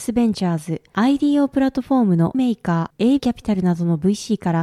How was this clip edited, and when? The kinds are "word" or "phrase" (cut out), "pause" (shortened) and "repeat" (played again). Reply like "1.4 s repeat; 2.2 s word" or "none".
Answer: 2.3 s word; 3.2 s word